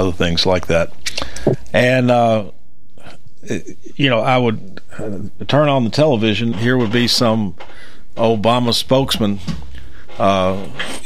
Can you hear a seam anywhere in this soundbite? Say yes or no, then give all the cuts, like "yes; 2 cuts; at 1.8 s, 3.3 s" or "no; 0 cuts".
yes; 1 cut; at 6.5 s